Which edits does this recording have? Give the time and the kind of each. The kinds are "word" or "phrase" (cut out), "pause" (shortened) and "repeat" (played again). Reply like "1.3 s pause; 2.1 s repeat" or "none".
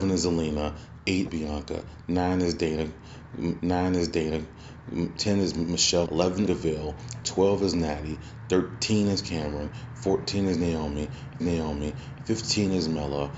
1.3 s word; 3.6 s repeat; 6.0 s word; 6.4 s phrase; 11.4 s repeat